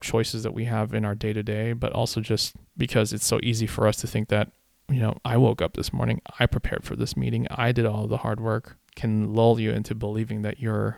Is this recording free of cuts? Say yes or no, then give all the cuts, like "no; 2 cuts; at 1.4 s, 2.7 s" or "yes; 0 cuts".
no; 2 cuts; at 5.2 s, 8.9 s